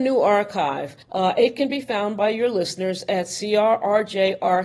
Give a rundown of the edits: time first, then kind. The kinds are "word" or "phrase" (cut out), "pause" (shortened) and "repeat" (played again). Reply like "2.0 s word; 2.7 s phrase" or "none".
1.0 s pause

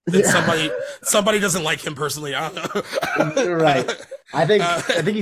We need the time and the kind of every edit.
none

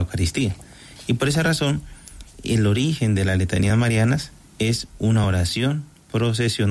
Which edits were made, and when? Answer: none

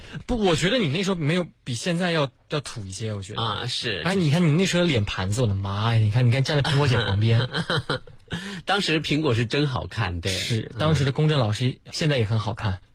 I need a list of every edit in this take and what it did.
4.1 s phrase; 11.9 s word

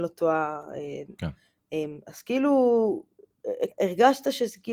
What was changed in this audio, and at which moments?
1.2 s word; 3.7 s word

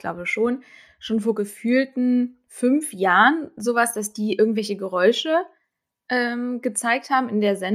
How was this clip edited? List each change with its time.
none

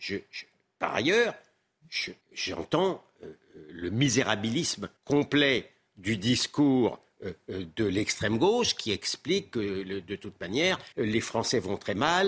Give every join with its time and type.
2.2 s pause; 5.0 s pause; 10.9 s pause

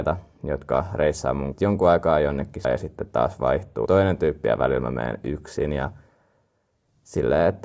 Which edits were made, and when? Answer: 1.5 s word; 2.6 s word; 3.9 s word

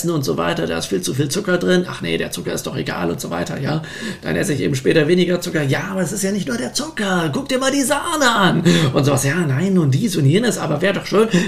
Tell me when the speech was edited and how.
none

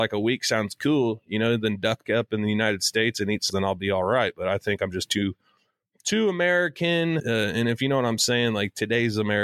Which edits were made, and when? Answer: 2.0 s word; 3.5 s word; 7.2 s word

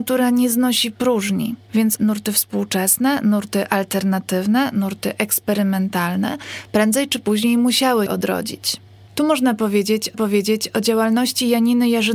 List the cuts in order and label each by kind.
2.0 s word; 8.1 s word; 10.1 s repeat

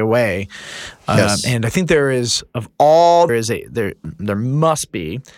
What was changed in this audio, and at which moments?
3.3 s phrase

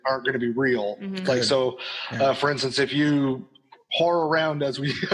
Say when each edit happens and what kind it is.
none

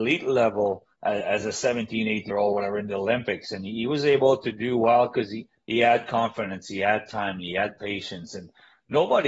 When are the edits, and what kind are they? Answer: 0.9 s pause; 2.3 s word

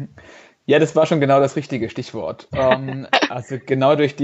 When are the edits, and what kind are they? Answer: none

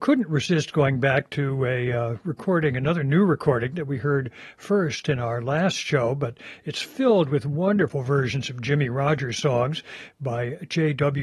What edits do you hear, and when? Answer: none

